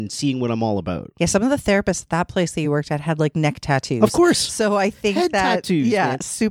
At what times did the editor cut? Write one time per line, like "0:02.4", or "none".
none